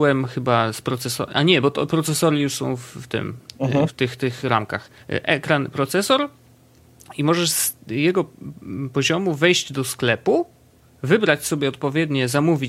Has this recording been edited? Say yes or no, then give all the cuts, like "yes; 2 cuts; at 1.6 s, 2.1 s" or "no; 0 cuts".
yes; 1 cut; at 5.0 s